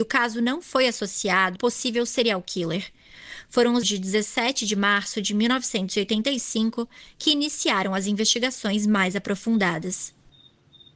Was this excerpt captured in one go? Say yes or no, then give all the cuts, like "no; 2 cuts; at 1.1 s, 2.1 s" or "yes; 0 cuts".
no; 2 cuts; at 1.6 s, 3.8 s